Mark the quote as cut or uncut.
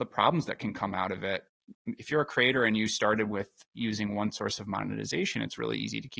uncut